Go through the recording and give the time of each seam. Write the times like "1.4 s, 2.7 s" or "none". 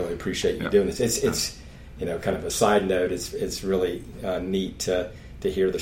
none